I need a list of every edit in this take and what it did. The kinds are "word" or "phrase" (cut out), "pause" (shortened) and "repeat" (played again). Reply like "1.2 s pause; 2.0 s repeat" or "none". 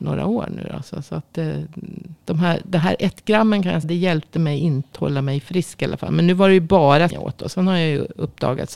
2.2 s pause; 3.8 s word; 4.9 s word; 7.1 s word